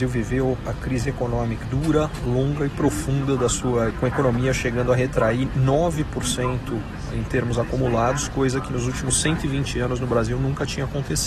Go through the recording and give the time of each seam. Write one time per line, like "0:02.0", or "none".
0:01.6
0:03.9